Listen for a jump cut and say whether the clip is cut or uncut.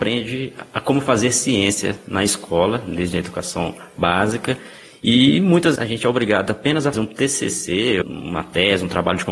cut